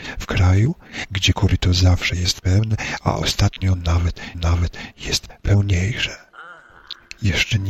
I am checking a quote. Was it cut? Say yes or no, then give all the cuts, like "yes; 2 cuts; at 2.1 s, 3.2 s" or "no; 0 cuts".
yes; 1 cut; at 4.3 s